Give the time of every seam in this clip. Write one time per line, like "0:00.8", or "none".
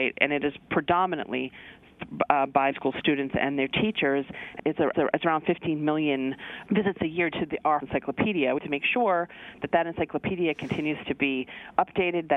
0:02.7
0:04.6
0:04.9
0:06.7
0:07.3
0:07.8
0:08.6